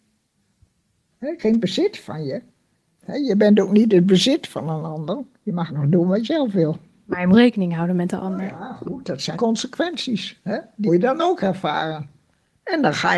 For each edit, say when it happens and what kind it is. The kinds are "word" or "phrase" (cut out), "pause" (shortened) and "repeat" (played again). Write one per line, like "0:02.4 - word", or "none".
0:01.4 - word
0:05.7 - word
0:06.2 - word
0:07.3 - word
0:09.3 - word
0:10.9 - word